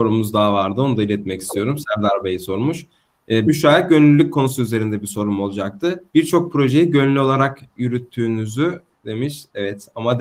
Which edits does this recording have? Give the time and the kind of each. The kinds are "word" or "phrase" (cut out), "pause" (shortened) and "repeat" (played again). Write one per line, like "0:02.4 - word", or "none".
0:03.5 - word
0:06.1 - pause